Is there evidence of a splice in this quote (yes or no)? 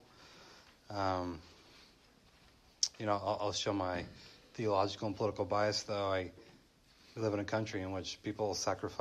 no